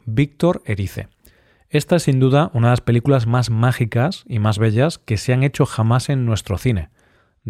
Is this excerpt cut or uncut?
uncut